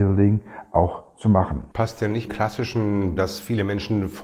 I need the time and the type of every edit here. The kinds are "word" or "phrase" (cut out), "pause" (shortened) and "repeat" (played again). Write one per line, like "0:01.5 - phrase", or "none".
0:01.7 - pause
0:02.3 - phrase
0:03.2 - phrase